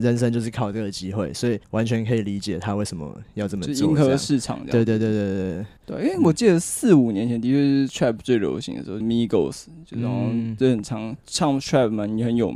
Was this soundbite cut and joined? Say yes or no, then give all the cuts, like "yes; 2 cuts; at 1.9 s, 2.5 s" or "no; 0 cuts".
yes; 3 cuts; at 1.6 s, 5.8 s, 9.0 s